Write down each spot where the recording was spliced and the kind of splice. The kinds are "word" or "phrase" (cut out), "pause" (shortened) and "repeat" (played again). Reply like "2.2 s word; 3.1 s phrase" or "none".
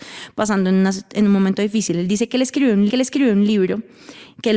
2.9 s repeat